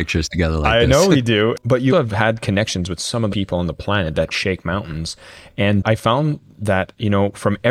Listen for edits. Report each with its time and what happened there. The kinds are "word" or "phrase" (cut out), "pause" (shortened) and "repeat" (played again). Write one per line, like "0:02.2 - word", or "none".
0:01.9 - word
0:03.3 - phrase
0:04.3 - word